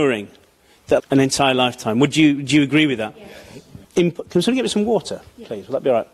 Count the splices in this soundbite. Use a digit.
2